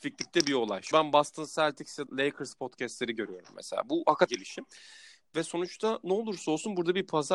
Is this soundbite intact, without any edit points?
no; 3 cuts; at 0.9 s, 2.1 s, 4.3 s

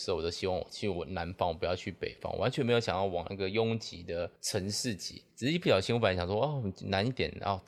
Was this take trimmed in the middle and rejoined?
yes; 2 cuts; at 4.4 s, 5.3 s

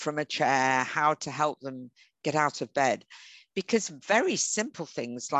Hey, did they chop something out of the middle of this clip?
no; 0 cuts

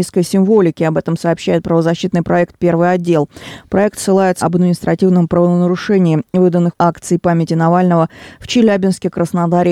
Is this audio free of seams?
no; 2 cuts; at 4.4 s, 6.7 s

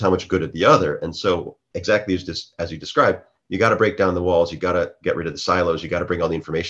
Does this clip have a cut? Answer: no; 0 cuts

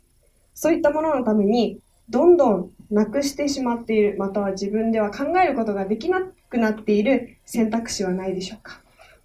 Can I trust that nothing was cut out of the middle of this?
yes; 0 cuts

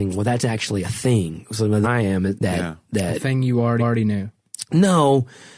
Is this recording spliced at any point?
yes; 3 cuts; at 1.8 s, 2.3 s, 3.8 s

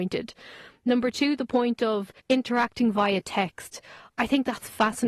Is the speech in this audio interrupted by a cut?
yes; 1 cut; at 2.2 s

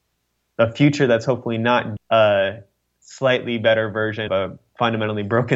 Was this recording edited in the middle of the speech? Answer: yes; 2 cuts; at 2.0 s, 4.3 s

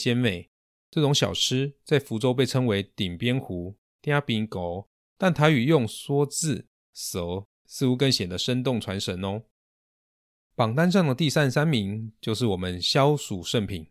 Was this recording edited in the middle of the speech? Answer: no; 0 cuts

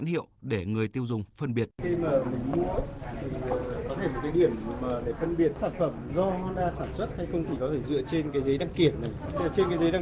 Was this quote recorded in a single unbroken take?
no; 1 cut; at 1.7 s

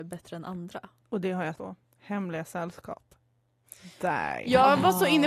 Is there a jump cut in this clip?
yes; 1 cut; at 1.5 s

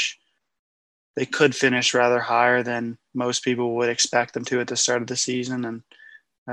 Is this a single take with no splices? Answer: yes; 0 cuts

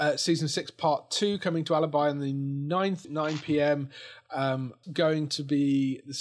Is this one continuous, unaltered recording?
no; 2 cuts; at 3.0 s, 4.8 s

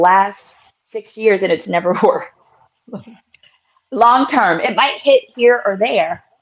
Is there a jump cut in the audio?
no; 0 cuts

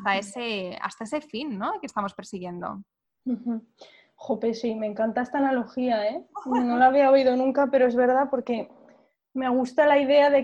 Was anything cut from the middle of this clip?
no; 0 cuts

